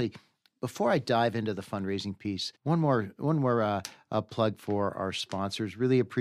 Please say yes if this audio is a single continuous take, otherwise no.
no